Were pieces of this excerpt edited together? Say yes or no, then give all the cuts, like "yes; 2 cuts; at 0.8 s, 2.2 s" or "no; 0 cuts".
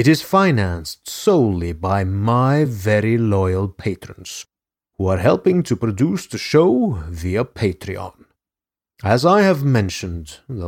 no; 0 cuts